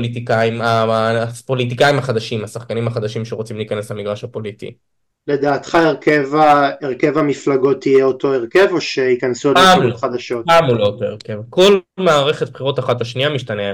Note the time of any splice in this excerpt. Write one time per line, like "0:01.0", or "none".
none